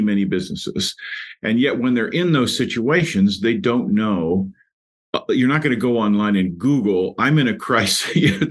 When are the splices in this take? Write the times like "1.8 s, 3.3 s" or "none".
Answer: none